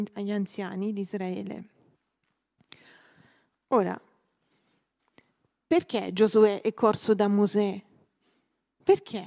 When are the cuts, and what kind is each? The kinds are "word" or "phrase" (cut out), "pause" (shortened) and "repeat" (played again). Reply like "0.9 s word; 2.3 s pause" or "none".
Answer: none